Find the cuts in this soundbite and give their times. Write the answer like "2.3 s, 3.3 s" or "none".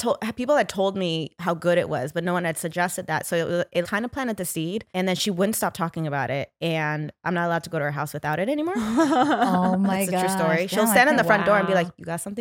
3.8 s, 4.9 s